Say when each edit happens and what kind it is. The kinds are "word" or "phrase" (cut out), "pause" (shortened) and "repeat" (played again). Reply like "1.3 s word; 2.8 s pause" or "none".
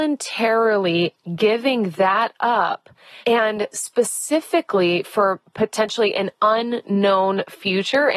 none